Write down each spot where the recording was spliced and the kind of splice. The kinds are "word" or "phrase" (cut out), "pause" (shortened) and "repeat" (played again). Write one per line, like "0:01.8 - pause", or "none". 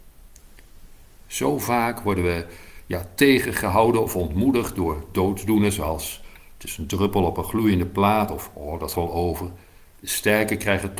0:08.9 - word